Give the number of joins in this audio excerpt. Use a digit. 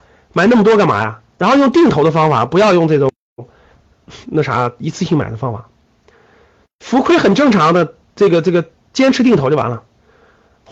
1